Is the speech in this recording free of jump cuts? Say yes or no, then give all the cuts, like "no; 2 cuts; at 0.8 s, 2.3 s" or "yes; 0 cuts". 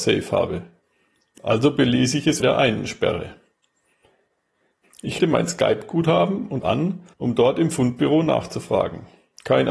no; 4 cuts; at 2.4 s, 5.2 s, 6.6 s, 7.1 s